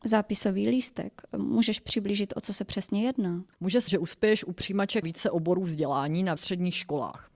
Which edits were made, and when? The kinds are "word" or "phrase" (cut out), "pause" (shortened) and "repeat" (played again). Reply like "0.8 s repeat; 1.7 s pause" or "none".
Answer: 3.5 s pause; 3.9 s word; 5.0 s word; 6.4 s word